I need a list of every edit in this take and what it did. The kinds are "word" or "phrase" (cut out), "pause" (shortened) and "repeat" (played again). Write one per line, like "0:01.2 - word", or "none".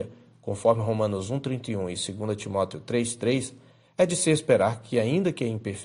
none